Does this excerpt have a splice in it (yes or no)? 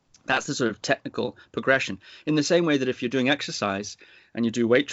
no